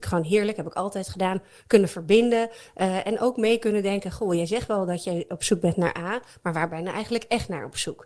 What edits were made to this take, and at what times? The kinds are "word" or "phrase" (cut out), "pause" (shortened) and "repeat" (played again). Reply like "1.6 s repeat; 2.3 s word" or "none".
none